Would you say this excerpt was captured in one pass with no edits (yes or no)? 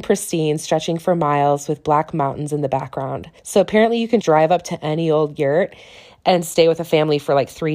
no